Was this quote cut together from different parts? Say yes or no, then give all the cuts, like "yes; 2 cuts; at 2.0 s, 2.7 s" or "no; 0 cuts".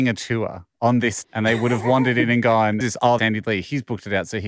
yes; 3 cuts; at 1.2 s, 2.8 s, 3.2 s